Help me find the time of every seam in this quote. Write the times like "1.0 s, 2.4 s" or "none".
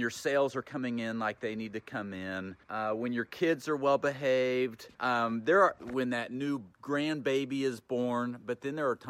2.6 s, 4.9 s, 6.7 s